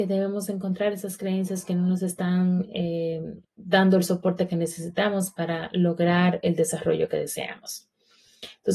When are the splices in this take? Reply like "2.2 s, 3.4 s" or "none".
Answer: 3.4 s